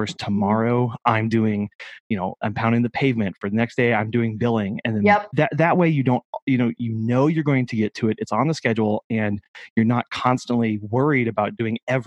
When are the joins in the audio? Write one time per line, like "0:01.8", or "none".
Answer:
0:02.4
0:04.8